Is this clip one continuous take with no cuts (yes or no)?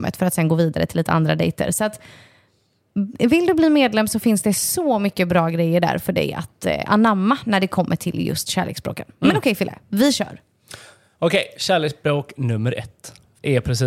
yes